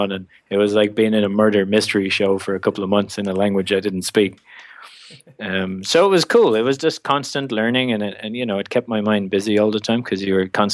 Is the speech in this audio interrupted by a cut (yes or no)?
no